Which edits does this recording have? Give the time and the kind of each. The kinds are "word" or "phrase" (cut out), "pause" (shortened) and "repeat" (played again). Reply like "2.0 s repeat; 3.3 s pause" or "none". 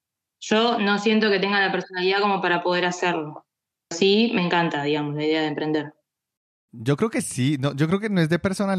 3.9 s word